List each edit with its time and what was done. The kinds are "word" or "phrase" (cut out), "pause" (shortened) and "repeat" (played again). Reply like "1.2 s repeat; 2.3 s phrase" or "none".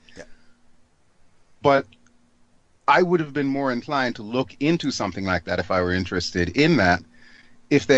none